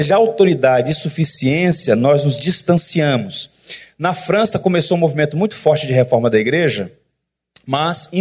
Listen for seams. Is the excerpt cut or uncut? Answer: uncut